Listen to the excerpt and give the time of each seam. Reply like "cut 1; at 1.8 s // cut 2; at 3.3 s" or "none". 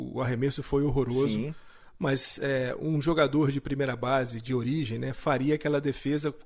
none